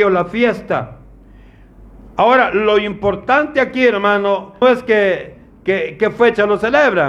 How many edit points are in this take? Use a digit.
1